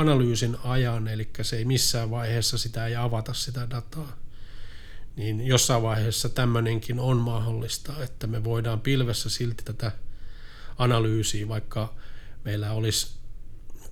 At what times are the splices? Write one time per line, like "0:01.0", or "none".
0:09.6